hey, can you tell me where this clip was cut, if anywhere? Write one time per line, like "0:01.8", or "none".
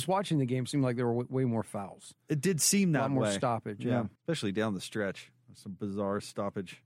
0:04.2